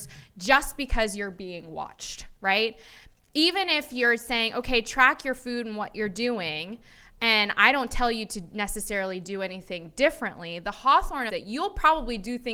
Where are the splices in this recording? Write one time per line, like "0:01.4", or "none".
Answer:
0:11.3